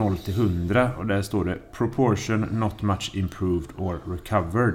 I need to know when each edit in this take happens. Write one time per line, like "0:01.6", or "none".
none